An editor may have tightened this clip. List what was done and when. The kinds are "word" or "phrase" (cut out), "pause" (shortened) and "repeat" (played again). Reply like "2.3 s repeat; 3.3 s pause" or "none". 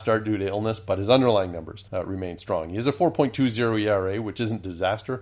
1.9 s pause